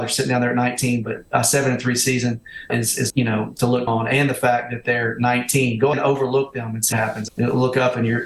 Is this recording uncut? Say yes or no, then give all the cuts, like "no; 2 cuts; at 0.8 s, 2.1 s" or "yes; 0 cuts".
no; 6 cuts; at 2.7 s, 3.1 s, 3.9 s, 5.9 s, 6.9 s, 7.3 s